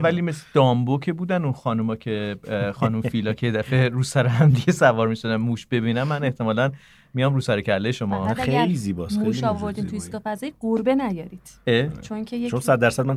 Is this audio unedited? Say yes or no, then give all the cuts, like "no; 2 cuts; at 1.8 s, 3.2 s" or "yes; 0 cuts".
yes; 0 cuts